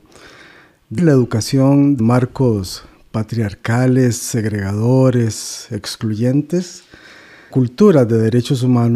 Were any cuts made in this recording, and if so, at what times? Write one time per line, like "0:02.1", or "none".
0:01.0
0:02.0
0:07.5